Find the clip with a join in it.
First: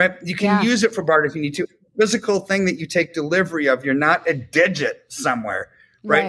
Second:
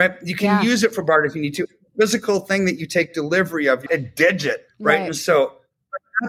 second; 2 cuts; at 3.9 s, 4.7 s

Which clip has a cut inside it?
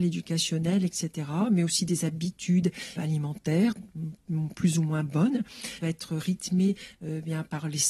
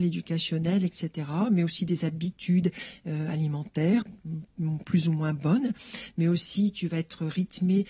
first; 2 cuts; at 3.0 s, 5.8 s

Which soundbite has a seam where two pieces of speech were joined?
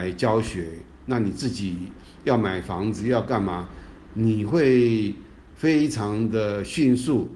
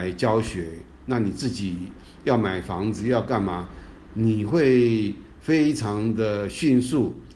second; 1 cut; at 5.3 s

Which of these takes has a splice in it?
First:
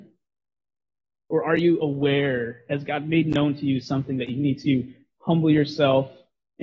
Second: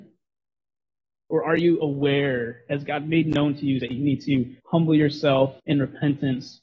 second; 3 cuts; at 3.8 s, 4.6 s, 5.6 s

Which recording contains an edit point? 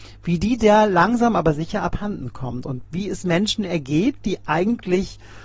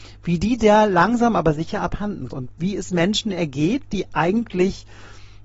second; 1 cut; at 2.3 s

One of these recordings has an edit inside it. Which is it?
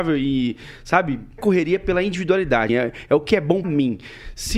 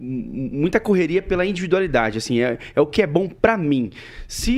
first; 3 cuts; at 1.4 s, 2.7 s, 3.6 s

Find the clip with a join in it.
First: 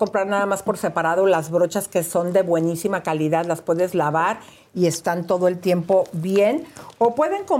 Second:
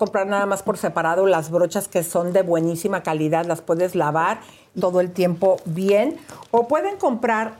second; 1 cut; at 4.8 s

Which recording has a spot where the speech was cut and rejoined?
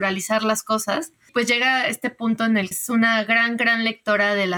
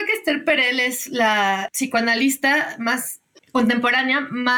first; 2 cuts; at 1.3 s, 2.7 s

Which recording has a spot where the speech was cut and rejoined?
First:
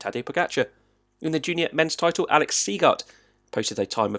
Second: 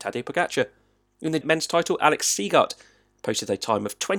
second; 1 cut; at 1.4 s

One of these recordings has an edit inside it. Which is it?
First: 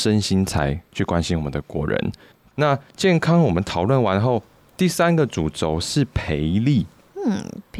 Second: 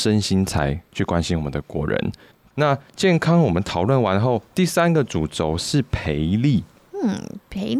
second; 1 cut; at 4.5 s

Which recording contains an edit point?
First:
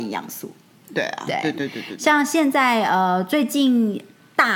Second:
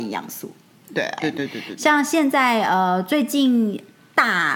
second; 1 cut; at 1.2 s

